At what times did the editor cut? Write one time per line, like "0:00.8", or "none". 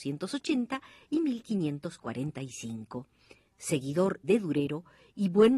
0:04.2